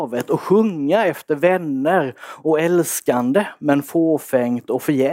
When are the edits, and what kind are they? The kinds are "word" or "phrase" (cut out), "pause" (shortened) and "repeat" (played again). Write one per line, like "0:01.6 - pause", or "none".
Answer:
none